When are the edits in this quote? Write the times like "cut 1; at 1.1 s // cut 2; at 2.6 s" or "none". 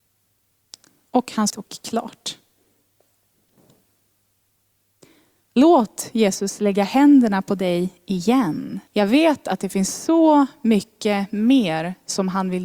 cut 1; at 1.5 s // cut 2; at 8.9 s